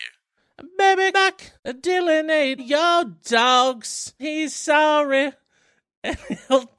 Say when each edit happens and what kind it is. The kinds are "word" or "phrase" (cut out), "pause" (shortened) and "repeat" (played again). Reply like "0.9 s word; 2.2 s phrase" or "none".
1.1 s word; 1.6 s pause; 2.6 s word; 4.2 s word